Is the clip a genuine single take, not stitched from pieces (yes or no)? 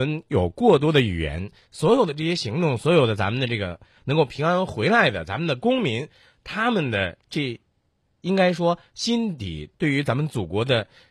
yes